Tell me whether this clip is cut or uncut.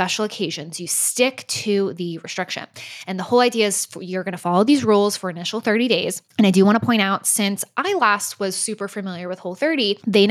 cut